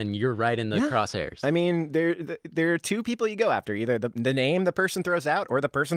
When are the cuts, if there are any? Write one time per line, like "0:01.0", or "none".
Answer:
none